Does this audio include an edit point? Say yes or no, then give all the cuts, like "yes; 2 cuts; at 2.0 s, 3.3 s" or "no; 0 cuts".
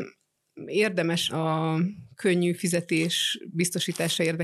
no; 0 cuts